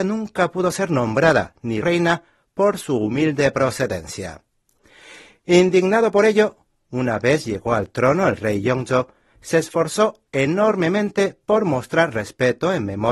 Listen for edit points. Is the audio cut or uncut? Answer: cut